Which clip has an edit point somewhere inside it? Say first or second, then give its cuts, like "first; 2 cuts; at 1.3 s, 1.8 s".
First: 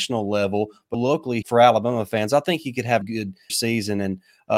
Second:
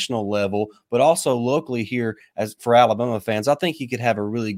first; 4 cuts; at 0.9 s, 1.4 s, 3.0 s, 3.5 s